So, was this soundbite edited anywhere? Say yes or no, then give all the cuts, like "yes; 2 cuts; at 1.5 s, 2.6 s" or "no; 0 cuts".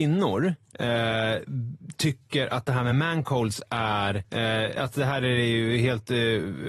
no; 0 cuts